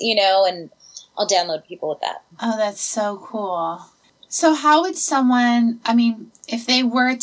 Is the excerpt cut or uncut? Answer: uncut